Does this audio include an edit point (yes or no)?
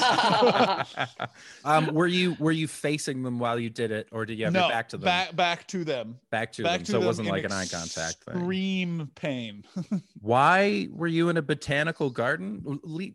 yes